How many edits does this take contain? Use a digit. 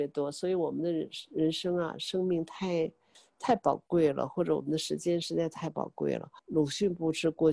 1